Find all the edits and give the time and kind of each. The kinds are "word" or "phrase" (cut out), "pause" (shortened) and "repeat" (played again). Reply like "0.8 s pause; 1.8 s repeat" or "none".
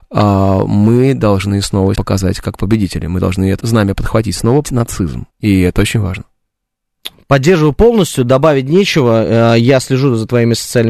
1.9 s word; 3.6 s word; 4.6 s word; 5.3 s pause